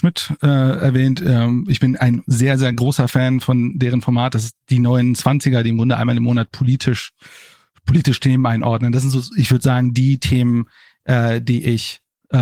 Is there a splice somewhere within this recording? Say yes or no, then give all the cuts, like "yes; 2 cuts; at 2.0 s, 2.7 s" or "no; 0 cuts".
no; 0 cuts